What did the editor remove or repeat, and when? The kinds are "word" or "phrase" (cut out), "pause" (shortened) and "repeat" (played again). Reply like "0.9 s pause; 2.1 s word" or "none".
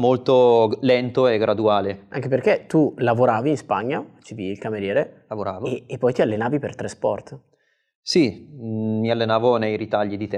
none